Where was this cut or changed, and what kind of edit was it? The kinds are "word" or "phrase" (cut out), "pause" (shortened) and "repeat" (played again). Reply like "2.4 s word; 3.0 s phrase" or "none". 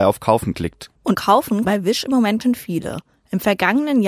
1.1 s word; 1.6 s word; 2.4 s word

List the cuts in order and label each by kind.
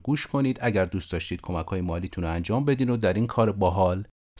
none

